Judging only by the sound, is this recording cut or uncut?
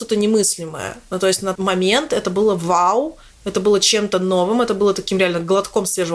cut